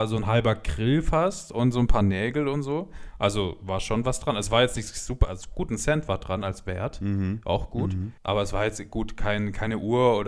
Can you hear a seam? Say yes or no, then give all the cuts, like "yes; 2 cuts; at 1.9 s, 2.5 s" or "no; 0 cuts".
yes; 1 cut; at 8.2 s